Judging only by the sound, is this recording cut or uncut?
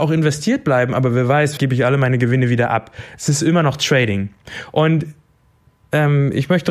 cut